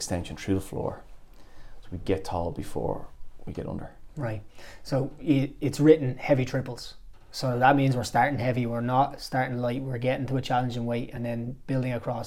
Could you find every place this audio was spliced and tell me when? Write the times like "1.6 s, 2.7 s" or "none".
none